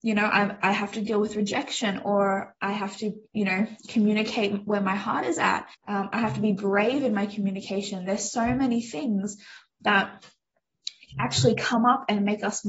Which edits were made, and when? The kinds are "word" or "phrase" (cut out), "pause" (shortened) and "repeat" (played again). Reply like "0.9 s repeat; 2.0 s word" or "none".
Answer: 5.7 s pause